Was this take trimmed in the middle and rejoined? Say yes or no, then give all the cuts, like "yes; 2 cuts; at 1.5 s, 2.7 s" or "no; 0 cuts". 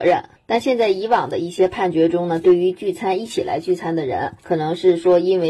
yes; 1 cut; at 4.4 s